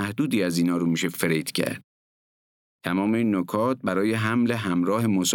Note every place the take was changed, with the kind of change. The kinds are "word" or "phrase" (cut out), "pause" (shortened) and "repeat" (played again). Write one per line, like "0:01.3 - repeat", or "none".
none